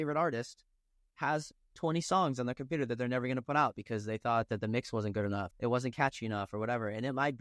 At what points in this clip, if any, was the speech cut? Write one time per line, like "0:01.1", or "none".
0:05.5

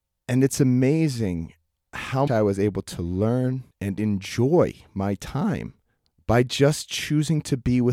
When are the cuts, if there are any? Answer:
0:02.3
0:03.7
0:06.0

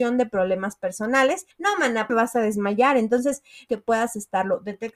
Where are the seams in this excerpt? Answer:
0:01.5
0:02.1
0:03.7

